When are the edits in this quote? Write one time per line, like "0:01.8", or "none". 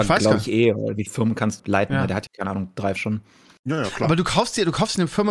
0:01.1
0:01.6
0:02.3
0:03.0